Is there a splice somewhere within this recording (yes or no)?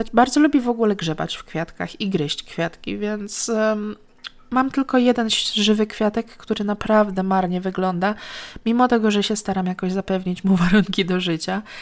no